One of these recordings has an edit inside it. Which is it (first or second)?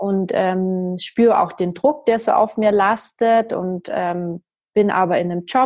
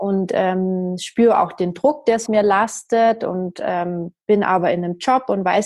second